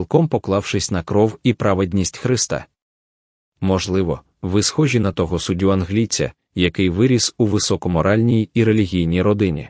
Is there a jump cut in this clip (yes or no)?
no